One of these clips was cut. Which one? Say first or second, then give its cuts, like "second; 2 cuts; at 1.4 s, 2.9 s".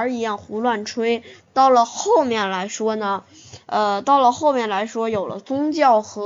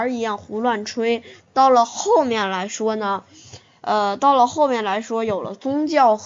first; 1 cut; at 3.6 s